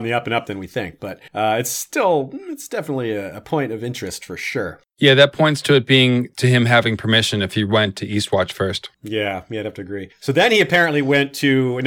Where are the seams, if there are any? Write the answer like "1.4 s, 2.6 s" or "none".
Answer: 1.3 s, 4.9 s, 8.9 s, 10.1 s